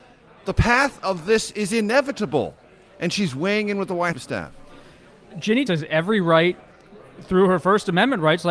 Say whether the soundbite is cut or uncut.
cut